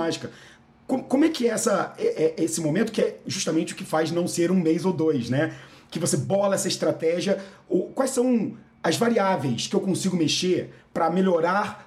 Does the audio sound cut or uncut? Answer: uncut